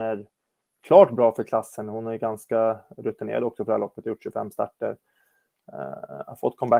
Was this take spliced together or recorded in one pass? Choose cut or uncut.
uncut